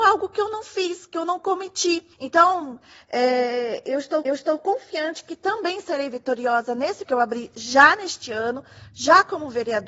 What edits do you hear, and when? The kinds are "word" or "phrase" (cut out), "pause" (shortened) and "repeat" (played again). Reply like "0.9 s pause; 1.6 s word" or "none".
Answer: 2.1 s pause; 4.2 s repeat; 7.0 s word